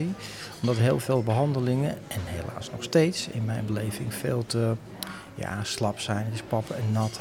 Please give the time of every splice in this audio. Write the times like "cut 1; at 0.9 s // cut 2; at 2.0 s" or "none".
none